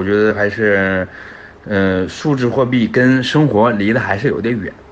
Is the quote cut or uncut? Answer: uncut